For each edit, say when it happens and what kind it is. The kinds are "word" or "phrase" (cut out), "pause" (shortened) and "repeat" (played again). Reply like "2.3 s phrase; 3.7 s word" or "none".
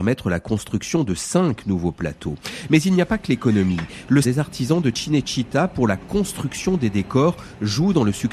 4.2 s word